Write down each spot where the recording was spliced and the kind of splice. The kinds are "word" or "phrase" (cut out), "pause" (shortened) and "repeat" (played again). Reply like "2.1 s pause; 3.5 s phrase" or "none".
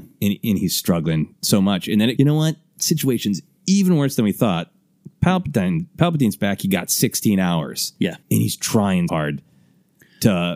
1.4 s pause; 2.2 s phrase; 8.2 s pause; 9.1 s word